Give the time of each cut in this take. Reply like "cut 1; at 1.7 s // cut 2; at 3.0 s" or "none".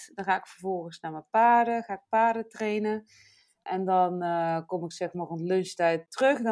none